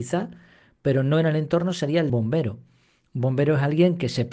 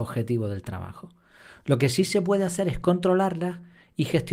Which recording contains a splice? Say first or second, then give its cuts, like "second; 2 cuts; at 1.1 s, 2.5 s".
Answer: first; 1 cut; at 2.1 s